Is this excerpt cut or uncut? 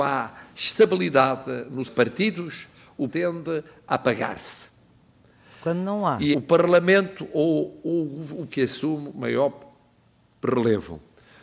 cut